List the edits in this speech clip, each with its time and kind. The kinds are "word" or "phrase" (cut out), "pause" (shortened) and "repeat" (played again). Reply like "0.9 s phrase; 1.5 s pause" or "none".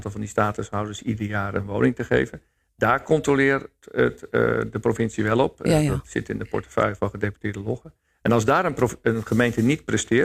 none